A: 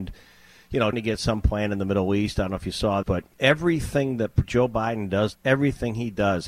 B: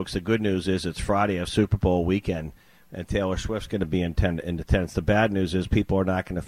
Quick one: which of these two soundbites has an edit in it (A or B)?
A